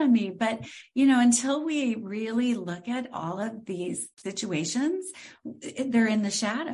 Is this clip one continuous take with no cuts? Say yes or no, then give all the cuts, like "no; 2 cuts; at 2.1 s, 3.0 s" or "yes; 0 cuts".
no; 1 cut; at 4.1 s